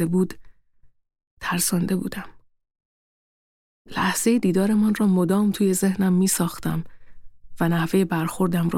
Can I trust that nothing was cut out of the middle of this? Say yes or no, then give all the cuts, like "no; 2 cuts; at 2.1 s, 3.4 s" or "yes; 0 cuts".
yes; 0 cuts